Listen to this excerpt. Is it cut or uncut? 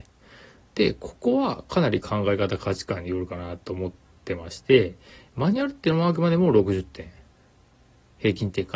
uncut